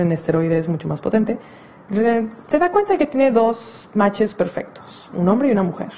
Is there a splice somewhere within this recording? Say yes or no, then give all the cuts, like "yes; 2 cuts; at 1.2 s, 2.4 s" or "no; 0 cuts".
no; 0 cuts